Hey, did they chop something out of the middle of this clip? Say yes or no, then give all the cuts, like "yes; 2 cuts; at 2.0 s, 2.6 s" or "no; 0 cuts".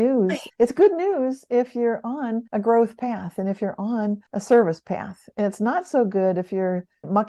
yes; 2 cuts; at 2.5 s, 4.3 s